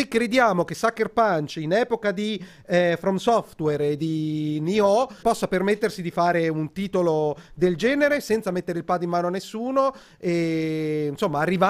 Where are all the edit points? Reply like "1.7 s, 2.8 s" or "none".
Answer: 5.2 s